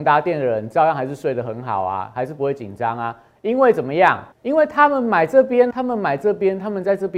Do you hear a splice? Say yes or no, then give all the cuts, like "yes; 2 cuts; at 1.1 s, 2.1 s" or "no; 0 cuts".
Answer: yes; 2 cuts; at 4.3 s, 5.7 s